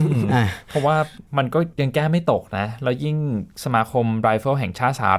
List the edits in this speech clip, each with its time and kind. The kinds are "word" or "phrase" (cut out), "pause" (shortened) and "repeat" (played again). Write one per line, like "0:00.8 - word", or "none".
0:01.3 - pause